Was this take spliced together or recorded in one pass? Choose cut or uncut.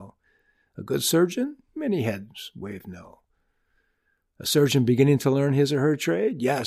uncut